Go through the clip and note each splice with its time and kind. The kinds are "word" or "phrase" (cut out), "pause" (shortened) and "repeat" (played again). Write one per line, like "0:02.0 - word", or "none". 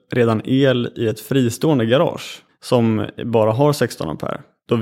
0:02.5 - pause